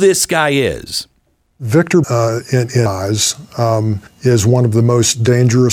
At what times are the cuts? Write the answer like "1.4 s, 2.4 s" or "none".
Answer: 2.0 s, 2.9 s, 4.1 s